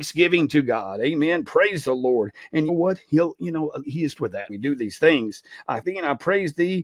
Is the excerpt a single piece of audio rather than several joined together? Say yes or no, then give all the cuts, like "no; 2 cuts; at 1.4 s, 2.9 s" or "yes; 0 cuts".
no; 5 cuts; at 2.7 s, 3.8 s, 4.1 s, 4.5 s, 5.8 s